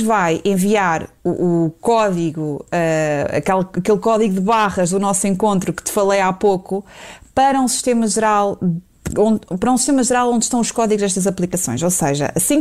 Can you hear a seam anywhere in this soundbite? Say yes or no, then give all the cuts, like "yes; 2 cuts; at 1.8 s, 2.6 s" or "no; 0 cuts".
no; 0 cuts